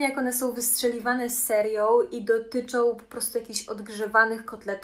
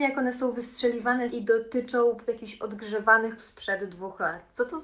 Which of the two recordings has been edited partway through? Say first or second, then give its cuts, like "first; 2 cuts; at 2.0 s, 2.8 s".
second; 3 cuts; at 1.3 s, 2.3 s, 3.4 s